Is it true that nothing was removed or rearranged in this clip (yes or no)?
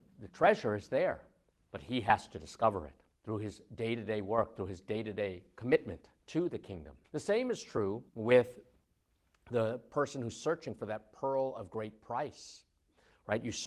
no